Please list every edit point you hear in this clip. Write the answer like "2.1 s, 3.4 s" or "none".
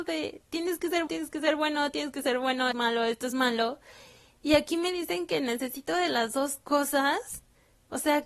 1.1 s, 2.7 s